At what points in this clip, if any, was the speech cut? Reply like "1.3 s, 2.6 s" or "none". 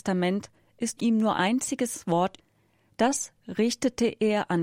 1.0 s, 1.3 s, 2.4 s